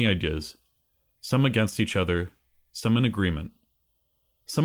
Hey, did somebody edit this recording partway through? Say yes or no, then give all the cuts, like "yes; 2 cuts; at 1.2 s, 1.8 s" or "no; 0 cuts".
no; 0 cuts